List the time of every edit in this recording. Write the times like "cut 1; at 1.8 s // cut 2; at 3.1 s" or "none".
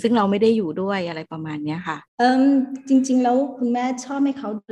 cut 1; at 2.1 s